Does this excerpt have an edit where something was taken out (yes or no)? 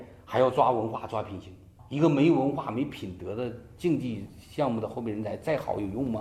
no